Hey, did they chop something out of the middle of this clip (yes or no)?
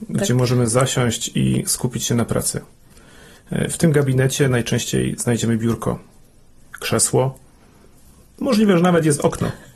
no